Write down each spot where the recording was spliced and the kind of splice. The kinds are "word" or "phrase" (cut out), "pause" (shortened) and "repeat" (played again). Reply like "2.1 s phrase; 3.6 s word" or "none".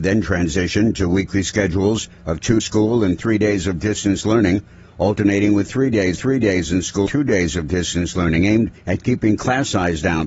2.1 s pause; 2.6 s phrase; 6.2 s repeat; 7.1 s word; 8.8 s pause